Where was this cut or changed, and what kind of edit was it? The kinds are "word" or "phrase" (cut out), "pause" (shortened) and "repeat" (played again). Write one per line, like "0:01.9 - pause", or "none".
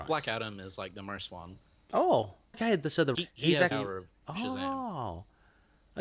0:01.3 - word
0:02.5 - word
0:03.1 - word
0:03.7 - word